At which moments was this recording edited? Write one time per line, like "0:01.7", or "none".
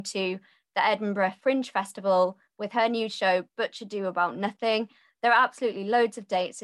none